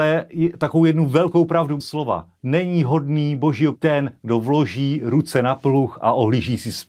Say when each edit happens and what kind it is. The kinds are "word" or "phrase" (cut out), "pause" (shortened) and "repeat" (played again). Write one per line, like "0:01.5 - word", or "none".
0:01.8 - word
0:02.4 - word
0:03.7 - word